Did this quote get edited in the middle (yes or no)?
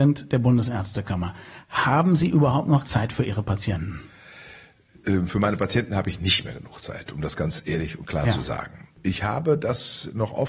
yes